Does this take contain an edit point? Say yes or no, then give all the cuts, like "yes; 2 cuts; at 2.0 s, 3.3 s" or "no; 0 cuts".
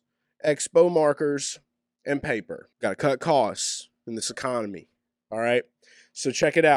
yes; 1 cut; at 2.7 s